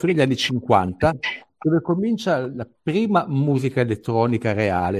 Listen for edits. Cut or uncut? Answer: uncut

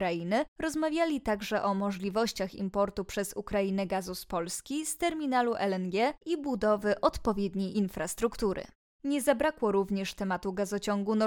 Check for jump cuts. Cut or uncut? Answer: uncut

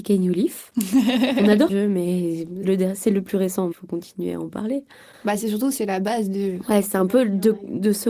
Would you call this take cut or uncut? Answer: cut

